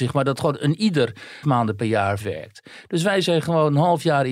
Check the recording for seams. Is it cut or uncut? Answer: cut